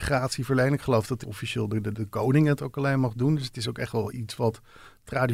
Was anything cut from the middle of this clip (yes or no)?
yes